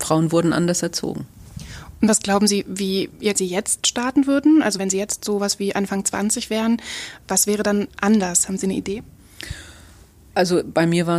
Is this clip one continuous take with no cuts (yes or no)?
no